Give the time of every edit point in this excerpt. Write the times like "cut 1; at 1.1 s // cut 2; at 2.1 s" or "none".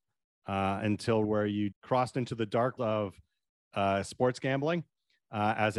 cut 1; at 1.2 s // cut 2; at 1.7 s // cut 3; at 2.8 s